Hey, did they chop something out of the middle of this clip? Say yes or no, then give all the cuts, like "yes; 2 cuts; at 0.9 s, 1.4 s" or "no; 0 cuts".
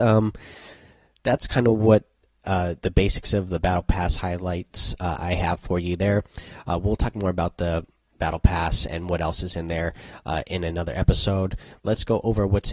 no; 0 cuts